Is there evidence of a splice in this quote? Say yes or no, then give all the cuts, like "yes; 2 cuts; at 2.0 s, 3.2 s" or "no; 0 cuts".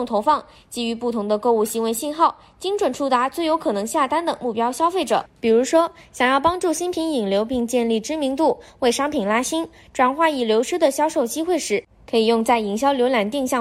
no; 0 cuts